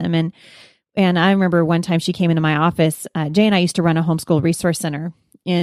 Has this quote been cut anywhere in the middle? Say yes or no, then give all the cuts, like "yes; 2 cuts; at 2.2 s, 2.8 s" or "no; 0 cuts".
no; 0 cuts